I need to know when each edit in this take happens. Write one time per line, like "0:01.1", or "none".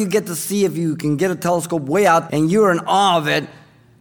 0:02.3